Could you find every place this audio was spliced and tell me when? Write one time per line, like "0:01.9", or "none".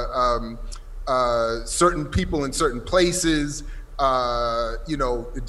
none